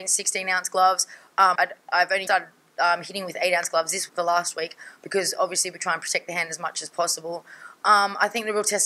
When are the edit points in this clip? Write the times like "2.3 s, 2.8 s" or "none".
1.5 s, 2.3 s, 4.1 s